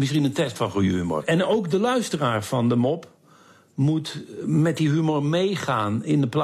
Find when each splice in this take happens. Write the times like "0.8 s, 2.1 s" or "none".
none